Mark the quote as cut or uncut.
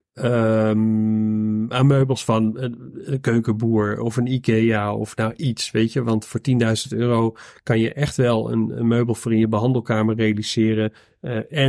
uncut